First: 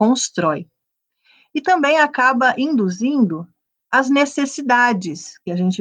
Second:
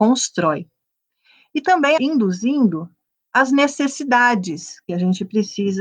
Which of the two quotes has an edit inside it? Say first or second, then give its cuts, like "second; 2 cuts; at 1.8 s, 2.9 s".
second; 1 cut; at 2.0 s